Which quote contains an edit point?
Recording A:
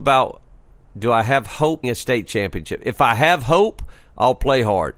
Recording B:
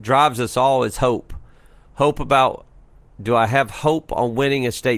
A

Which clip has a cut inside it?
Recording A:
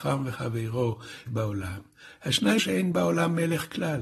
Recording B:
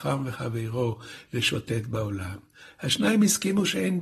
A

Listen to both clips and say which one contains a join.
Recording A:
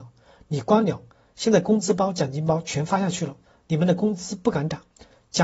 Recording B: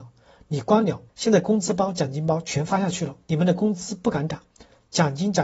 B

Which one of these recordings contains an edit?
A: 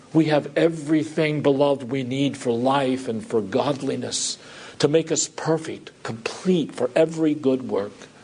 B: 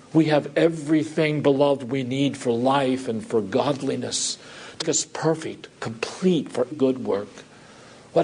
B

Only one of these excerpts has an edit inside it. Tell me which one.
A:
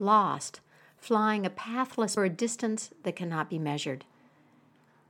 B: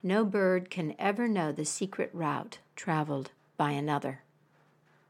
A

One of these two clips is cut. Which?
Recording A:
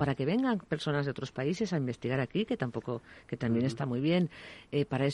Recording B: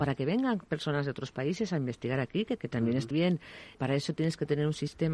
B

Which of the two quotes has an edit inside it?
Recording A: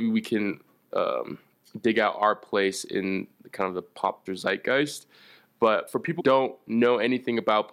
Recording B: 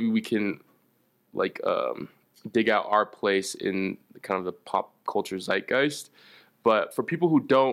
A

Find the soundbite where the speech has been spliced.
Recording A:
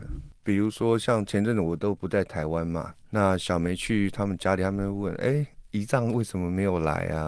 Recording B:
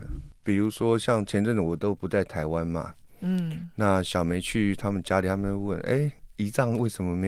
A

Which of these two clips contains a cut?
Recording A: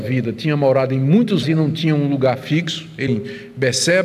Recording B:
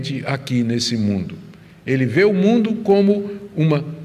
A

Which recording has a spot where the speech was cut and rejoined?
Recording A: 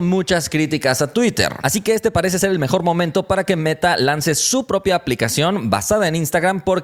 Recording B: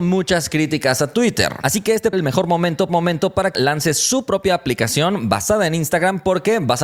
B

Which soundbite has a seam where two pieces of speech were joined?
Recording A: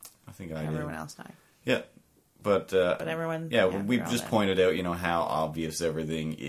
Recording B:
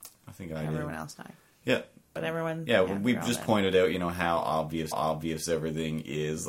B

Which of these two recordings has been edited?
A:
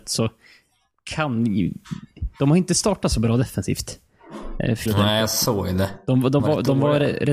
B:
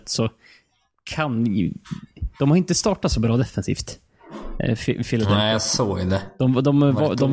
A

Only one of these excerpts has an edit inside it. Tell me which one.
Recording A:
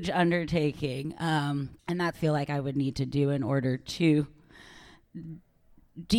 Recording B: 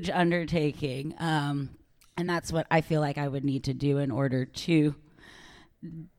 A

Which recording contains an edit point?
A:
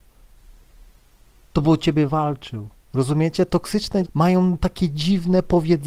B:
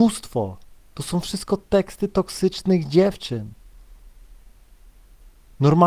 A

